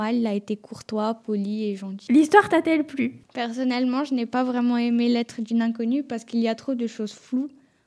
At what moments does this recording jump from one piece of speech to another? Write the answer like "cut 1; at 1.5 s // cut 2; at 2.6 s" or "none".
none